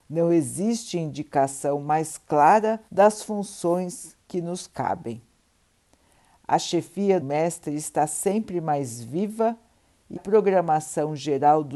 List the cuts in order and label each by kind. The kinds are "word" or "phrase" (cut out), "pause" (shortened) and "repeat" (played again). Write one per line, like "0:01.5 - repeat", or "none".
0:02.9 - pause
0:04.2 - pause
0:07.2 - phrase
0:10.2 - word